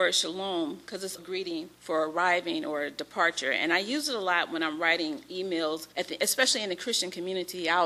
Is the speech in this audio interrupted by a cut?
yes; 3 cuts; at 1.2 s, 1.7 s, 5.9 s

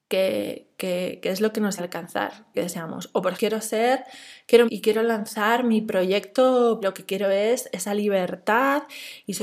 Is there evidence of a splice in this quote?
yes; 5 cuts; at 1.8 s, 2.5 s, 3.3 s, 4.7 s, 6.8 s

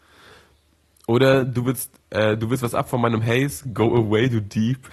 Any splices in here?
yes; 1 cut; at 2.0 s

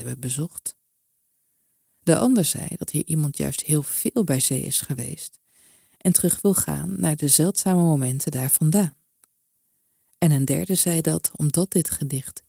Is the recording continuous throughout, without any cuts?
yes; 0 cuts

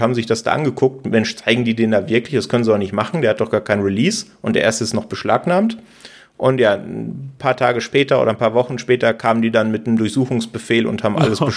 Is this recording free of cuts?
yes; 0 cuts

